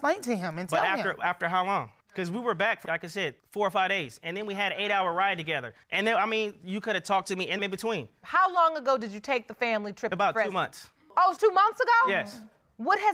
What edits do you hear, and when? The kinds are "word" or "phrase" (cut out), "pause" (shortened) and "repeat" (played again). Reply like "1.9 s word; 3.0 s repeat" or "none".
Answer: 2.9 s word; 3.4 s pause; 5.8 s pause; 7.6 s phrase; 11.4 s word